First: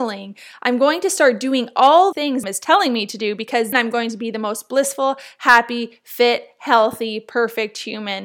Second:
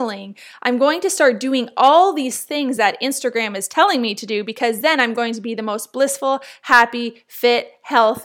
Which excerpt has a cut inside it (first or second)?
first